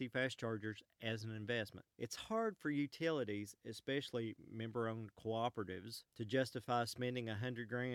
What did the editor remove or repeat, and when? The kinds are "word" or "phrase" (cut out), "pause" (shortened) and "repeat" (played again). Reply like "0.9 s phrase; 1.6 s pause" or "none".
1.9 s pause; 6.1 s pause